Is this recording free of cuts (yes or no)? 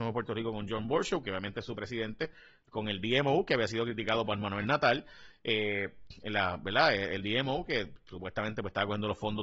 yes